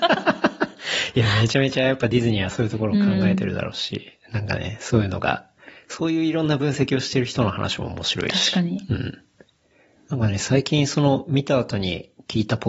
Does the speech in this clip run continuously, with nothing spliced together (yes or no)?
yes